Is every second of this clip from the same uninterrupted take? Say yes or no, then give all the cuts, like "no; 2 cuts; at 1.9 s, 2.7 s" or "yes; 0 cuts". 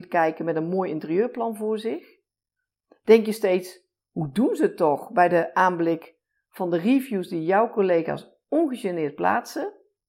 yes; 0 cuts